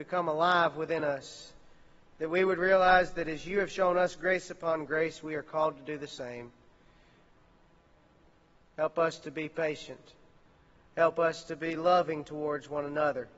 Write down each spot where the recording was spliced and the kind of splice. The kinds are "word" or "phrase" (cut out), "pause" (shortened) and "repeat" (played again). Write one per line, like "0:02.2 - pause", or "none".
none